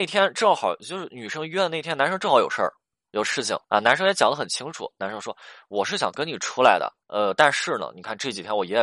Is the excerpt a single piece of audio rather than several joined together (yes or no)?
no